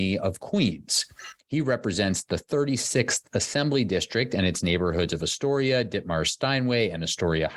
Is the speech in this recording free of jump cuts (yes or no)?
yes